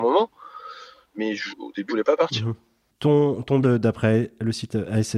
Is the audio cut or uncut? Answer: cut